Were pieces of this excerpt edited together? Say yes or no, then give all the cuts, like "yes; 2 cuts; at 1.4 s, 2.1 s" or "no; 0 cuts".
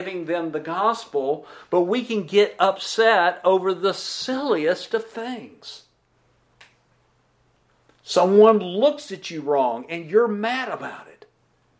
no; 0 cuts